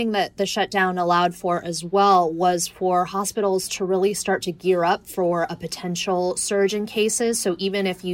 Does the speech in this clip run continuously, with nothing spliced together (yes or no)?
yes